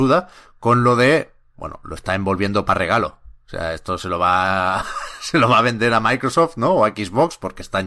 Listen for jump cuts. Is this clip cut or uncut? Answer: uncut